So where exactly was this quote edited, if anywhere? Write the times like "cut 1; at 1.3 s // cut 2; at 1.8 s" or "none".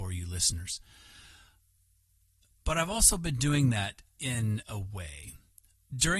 none